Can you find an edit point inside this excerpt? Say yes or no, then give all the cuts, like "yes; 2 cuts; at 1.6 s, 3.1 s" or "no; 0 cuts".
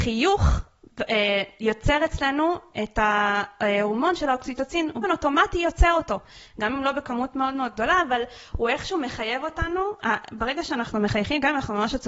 yes; 1 cut; at 5.0 s